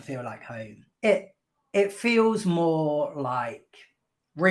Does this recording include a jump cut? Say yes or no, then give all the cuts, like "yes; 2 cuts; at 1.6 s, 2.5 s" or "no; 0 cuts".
yes; 1 cut; at 0.9 s